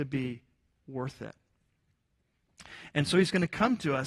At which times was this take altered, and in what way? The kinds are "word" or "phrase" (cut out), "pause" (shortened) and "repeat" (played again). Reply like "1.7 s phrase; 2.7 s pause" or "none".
none